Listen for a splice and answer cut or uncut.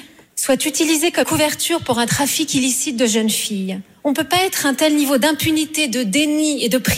cut